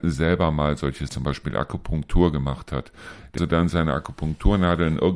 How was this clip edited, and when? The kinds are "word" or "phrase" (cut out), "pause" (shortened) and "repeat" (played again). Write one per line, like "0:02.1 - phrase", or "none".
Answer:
0:01.1 - phrase
0:03.4 - word